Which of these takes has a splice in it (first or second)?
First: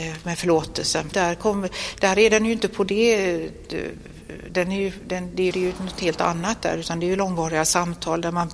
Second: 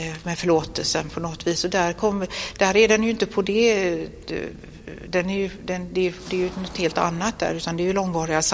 first